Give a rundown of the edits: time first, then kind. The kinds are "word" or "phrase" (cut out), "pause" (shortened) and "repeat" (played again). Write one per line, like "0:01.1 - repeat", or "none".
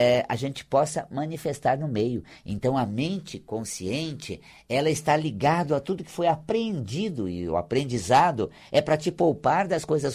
none